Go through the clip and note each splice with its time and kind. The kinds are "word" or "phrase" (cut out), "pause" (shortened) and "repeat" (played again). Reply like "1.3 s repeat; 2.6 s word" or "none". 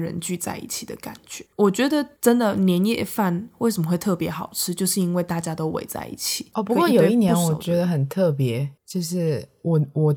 1.5 s pause; 2.2 s pause; 8.8 s pause